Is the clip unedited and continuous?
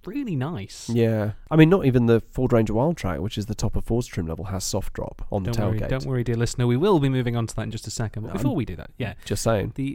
yes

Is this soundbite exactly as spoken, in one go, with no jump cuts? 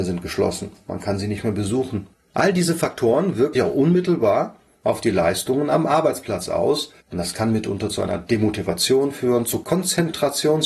no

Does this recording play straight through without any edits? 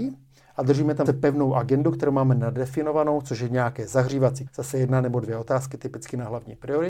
no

